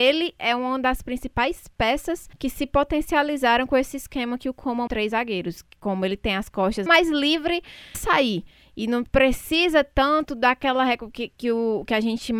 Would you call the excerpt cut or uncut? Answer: cut